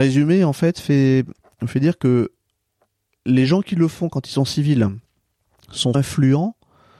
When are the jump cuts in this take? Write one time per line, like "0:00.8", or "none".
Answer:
0:05.9